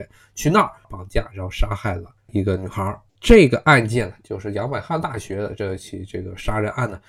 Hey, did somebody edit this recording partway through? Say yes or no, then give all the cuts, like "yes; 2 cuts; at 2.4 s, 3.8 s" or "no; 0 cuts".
yes; 2 cuts; at 2.2 s, 3.1 s